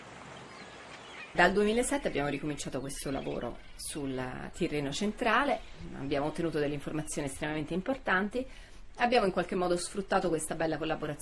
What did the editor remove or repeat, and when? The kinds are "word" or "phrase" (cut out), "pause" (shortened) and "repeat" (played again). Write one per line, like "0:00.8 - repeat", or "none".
none